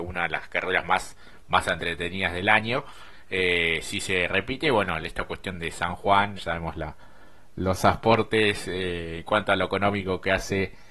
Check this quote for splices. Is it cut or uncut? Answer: cut